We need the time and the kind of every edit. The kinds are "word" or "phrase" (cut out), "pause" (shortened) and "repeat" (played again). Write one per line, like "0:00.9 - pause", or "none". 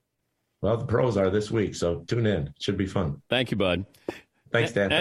none